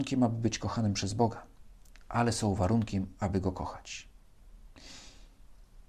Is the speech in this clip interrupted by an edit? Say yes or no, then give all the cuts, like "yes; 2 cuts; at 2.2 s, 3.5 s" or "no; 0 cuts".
no; 0 cuts